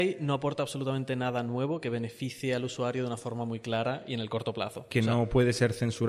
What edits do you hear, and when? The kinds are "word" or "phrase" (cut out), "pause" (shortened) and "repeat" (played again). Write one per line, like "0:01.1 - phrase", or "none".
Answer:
none